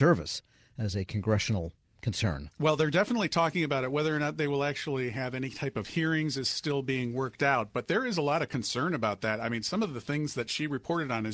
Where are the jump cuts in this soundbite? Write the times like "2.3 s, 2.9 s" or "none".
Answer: none